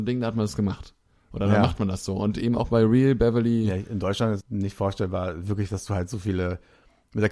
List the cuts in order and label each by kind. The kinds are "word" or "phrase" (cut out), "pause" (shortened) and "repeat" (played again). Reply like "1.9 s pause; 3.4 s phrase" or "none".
4.4 s word